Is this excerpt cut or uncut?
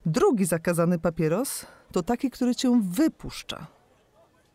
uncut